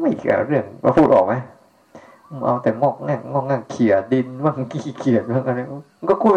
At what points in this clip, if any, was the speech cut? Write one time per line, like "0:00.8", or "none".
none